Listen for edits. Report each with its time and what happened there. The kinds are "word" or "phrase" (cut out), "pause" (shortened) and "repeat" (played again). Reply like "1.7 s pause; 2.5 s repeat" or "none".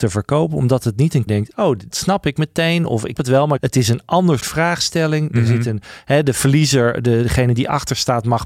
1.3 s phrase; 1.9 s word; 3.2 s word; 3.6 s phrase; 4.4 s word